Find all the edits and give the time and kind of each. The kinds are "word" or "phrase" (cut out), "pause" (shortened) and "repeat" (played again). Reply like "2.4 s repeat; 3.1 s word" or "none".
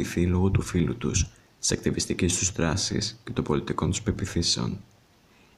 none